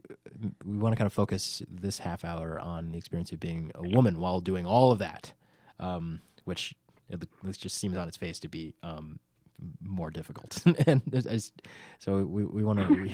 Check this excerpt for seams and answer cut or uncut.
uncut